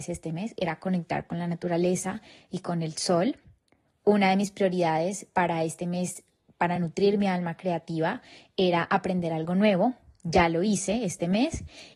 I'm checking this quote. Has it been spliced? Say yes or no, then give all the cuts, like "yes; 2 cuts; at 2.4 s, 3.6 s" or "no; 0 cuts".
no; 0 cuts